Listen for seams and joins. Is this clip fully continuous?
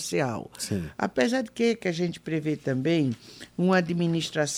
yes; 0 cuts

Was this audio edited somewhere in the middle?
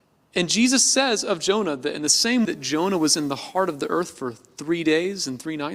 yes; 1 cut; at 2.4 s

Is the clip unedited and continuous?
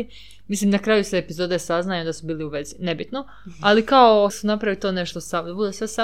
no; 1 cut; at 4.3 s

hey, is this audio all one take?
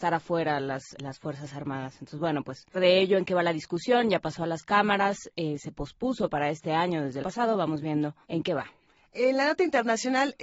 no; 4 cuts; at 1.0 s, 2.7 s, 7.2 s, 8.2 s

